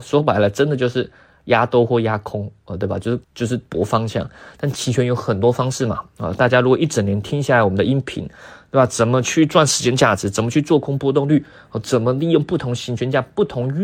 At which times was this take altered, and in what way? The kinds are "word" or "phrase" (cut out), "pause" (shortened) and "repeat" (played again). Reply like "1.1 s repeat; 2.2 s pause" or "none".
3.2 s pause